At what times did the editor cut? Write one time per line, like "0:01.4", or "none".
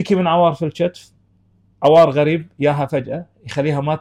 none

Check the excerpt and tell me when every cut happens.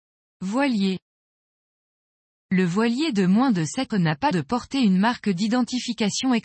0:03.9
0:04.3

